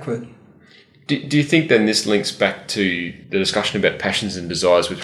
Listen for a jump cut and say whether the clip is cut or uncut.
cut